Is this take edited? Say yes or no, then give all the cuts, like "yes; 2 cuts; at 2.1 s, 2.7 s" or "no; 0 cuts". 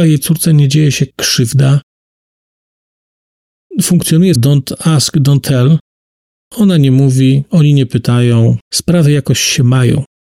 yes; 3 cuts; at 1.1 s, 4.4 s, 8.6 s